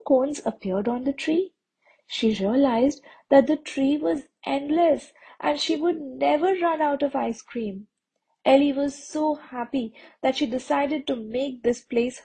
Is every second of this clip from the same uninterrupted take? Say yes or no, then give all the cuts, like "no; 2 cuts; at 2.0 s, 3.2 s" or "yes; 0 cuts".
yes; 0 cuts